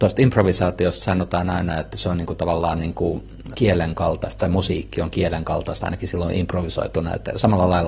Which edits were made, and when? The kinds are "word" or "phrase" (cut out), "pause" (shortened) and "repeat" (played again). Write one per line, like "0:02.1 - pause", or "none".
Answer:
0:03.5 - word